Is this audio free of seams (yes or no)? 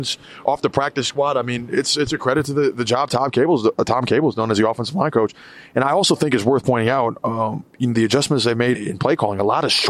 no